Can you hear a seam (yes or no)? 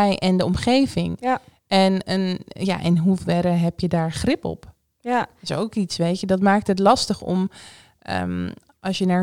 no